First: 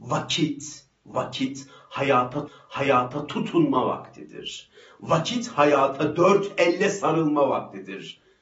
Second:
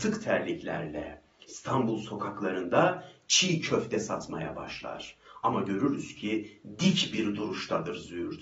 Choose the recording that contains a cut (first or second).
first